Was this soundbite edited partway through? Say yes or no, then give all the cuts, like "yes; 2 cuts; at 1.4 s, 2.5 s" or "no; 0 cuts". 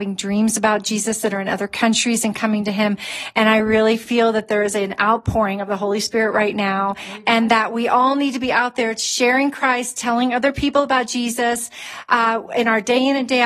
no; 0 cuts